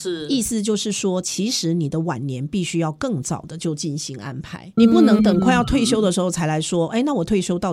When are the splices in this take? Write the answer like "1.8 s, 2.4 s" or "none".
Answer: 4.8 s